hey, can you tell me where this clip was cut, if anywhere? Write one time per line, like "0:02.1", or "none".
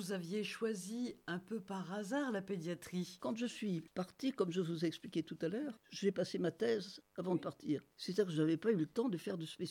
0:07.0
0:07.9